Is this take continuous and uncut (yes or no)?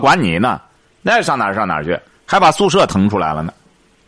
no